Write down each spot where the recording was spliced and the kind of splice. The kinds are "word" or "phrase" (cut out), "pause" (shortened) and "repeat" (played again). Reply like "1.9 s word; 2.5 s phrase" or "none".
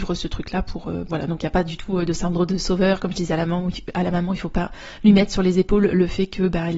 1.1 s word